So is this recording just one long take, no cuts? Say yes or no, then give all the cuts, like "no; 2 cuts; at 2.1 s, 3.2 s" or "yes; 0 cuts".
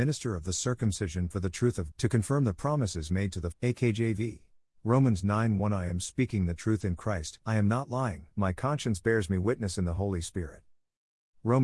no; 5 cuts; at 1.9 s, 3.5 s, 4.6 s, 7.4 s, 8.3 s